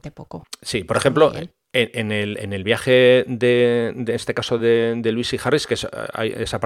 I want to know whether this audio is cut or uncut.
uncut